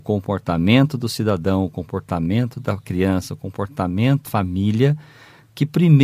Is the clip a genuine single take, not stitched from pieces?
no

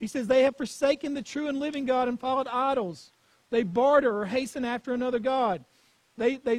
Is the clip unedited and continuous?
yes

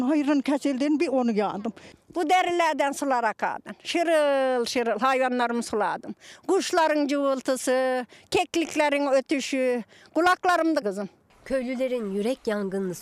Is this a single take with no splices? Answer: no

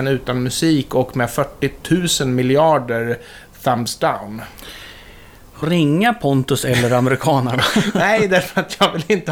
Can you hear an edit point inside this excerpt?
yes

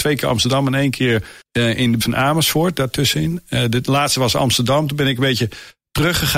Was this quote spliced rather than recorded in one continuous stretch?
yes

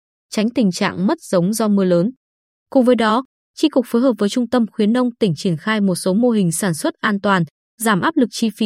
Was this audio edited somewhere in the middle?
no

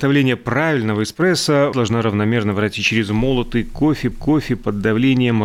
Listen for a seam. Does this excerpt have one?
yes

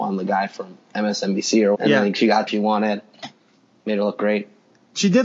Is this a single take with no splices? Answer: no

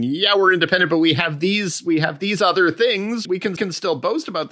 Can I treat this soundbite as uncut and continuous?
no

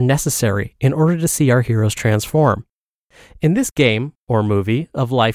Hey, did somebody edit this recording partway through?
no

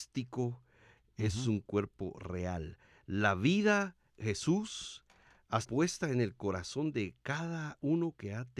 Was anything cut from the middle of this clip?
yes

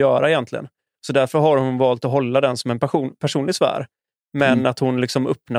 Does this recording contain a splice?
no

